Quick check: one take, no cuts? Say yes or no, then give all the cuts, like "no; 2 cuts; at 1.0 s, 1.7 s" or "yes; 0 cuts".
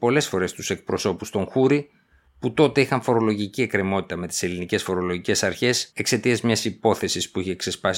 no; 1 cut; at 5.9 s